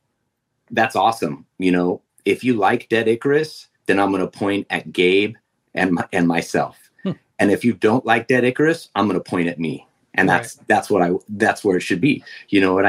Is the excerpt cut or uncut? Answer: uncut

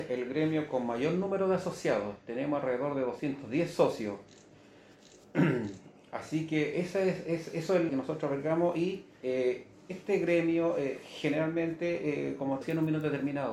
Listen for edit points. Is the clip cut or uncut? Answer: cut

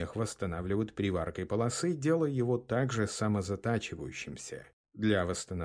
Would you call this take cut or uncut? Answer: uncut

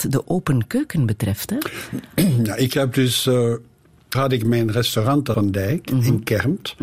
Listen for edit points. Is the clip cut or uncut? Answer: cut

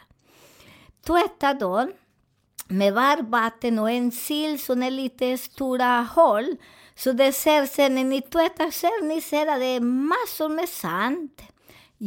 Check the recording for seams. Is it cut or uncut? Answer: uncut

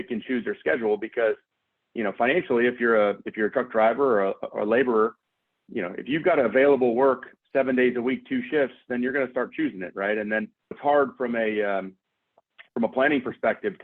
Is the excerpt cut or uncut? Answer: cut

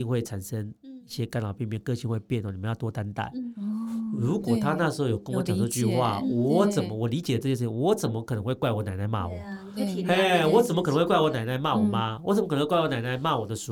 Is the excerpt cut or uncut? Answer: uncut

